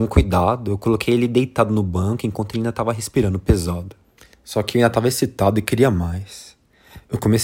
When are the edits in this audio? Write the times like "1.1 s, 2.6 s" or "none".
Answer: 4.2 s

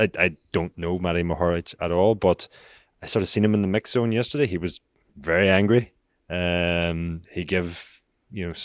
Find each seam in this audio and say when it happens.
none

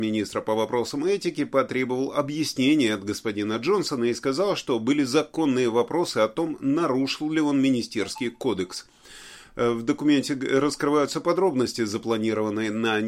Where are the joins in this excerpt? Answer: none

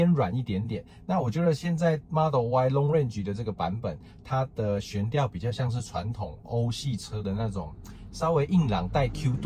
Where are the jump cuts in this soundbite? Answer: none

